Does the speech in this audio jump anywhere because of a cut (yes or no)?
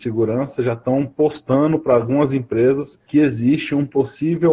yes